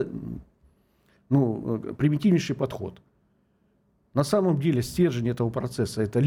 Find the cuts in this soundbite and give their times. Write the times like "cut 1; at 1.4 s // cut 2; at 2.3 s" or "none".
none